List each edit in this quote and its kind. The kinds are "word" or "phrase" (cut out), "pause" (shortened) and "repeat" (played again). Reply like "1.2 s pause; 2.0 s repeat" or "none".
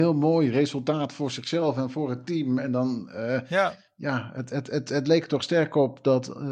none